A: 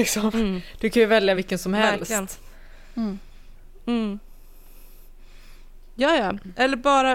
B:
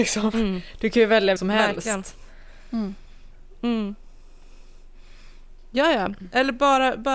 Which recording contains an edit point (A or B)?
B